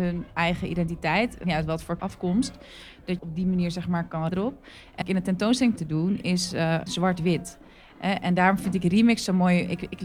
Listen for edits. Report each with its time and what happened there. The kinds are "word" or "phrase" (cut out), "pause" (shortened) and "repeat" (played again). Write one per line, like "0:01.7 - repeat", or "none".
0:01.4 - word
0:02.0 - word
0:03.2 - word
0:04.3 - word
0:05.0 - word
0:05.8 - word
0:06.9 - word